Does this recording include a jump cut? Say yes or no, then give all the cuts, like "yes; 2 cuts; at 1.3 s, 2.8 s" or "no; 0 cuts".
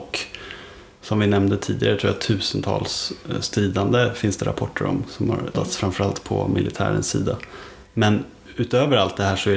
yes; 1 cut; at 5.5 s